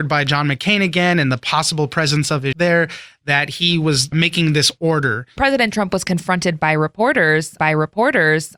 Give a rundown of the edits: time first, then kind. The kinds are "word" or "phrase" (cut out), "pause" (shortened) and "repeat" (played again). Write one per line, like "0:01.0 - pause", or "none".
0:02.5 - word
0:07.6 - repeat